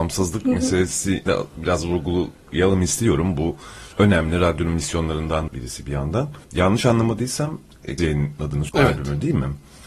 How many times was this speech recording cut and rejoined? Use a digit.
6